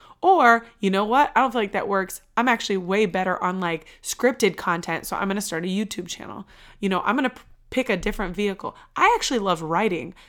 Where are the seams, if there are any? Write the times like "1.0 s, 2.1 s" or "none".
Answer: none